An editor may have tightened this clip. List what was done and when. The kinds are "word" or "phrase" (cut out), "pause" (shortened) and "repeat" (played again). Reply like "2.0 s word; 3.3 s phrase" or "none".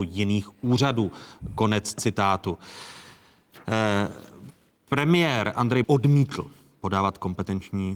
5.8 s word